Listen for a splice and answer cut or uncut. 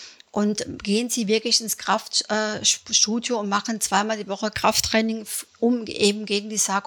uncut